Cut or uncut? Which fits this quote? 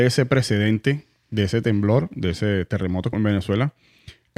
cut